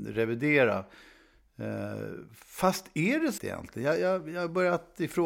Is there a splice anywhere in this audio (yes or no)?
yes